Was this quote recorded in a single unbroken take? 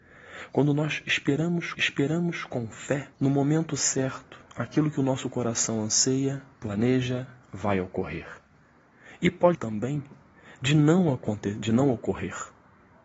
no; 4 cuts; at 1.7 s, 3.1 s, 6.5 s, 9.5 s

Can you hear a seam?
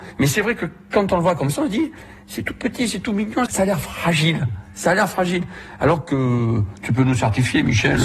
yes; 1 cut; at 3.5 s

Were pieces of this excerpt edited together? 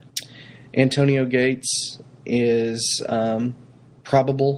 no; 0 cuts

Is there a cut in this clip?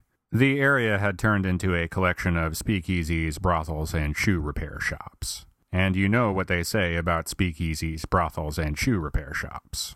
no; 0 cuts

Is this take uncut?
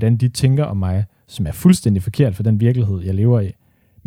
yes; 0 cuts

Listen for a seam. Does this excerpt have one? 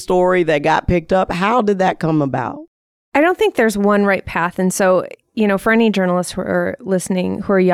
no; 0 cuts

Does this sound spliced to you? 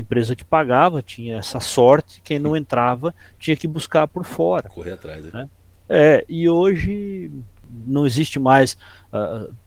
no; 0 cuts

